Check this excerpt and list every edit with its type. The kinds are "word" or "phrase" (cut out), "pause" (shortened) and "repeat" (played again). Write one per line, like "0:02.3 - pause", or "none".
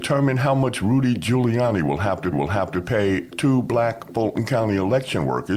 0:02.3 - repeat